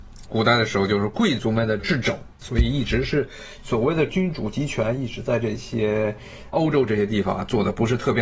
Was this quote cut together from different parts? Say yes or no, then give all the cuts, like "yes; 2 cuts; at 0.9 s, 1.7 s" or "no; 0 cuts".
yes; 1 cut; at 2.4 s